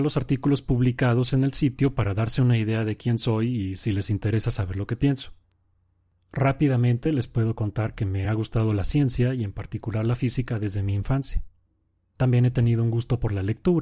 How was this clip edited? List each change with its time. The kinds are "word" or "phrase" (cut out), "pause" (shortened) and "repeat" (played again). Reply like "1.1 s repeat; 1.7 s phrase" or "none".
none